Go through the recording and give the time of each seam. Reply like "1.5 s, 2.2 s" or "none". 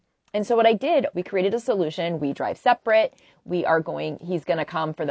1.1 s, 2.2 s